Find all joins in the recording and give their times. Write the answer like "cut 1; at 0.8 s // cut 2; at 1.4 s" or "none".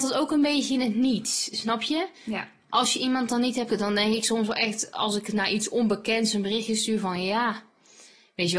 cut 1; at 3.7 s